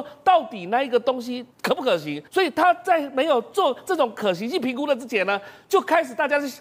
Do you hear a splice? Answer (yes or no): yes